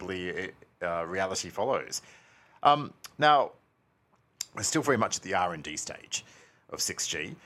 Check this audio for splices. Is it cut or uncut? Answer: uncut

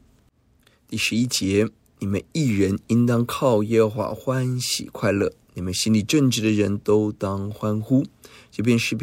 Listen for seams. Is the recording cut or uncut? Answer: uncut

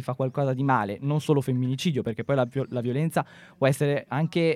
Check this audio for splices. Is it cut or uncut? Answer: uncut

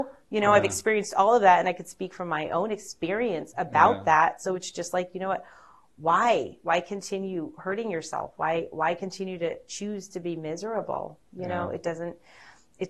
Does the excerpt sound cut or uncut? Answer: uncut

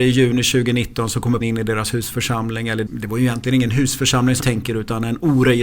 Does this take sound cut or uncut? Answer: cut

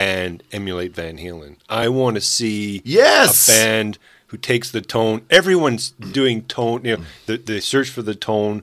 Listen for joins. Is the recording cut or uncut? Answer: uncut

